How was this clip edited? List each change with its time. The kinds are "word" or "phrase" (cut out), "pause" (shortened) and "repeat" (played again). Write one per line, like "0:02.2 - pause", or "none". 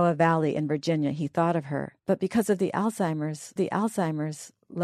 0:02.0 - pause
0:03.6 - repeat